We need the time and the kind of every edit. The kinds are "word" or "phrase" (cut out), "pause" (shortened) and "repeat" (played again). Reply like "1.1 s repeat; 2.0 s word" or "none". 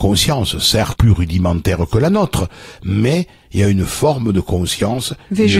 1.0 s word

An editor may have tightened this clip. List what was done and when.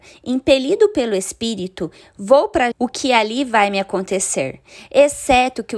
2.7 s phrase

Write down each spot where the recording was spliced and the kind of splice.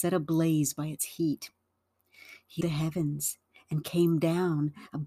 2.6 s word

